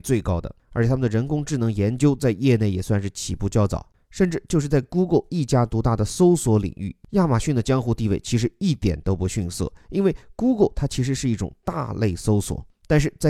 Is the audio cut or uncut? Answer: uncut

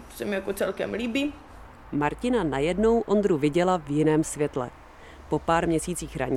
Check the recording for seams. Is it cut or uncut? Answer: uncut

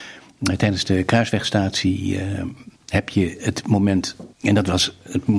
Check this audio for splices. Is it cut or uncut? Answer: cut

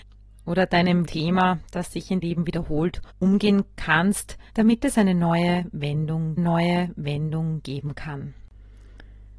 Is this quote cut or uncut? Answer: cut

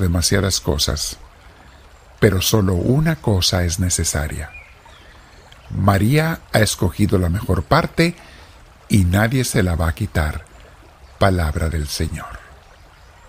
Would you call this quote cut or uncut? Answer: uncut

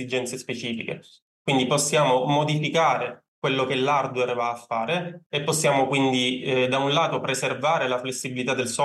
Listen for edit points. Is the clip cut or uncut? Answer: uncut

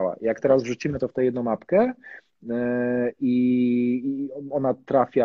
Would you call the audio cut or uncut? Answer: cut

